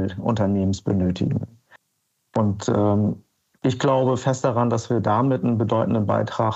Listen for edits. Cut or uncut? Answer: uncut